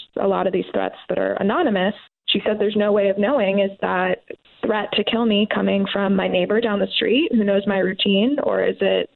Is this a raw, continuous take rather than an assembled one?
yes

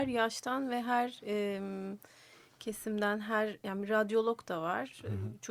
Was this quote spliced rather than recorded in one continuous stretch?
no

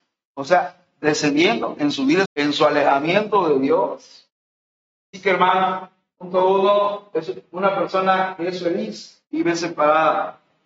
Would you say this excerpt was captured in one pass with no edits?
no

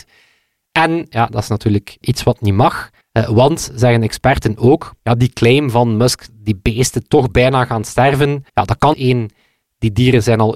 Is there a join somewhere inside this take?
yes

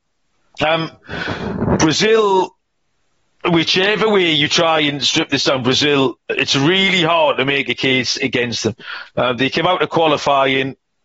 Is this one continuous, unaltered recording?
yes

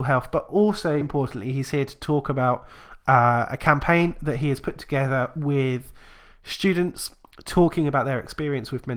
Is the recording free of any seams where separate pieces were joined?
no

